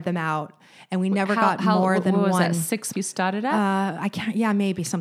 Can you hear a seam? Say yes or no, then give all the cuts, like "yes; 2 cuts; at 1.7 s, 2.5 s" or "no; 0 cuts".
yes; 1 cut; at 2.9 s